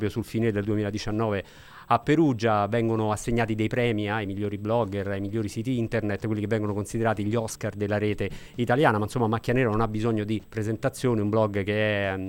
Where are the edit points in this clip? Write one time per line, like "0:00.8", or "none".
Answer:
0:10.4